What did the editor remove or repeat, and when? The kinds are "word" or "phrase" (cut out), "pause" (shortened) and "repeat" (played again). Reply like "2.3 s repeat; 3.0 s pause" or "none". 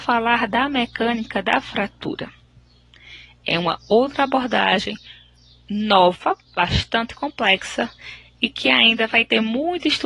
6.5 s pause